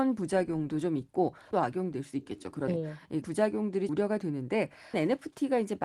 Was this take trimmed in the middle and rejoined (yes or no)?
yes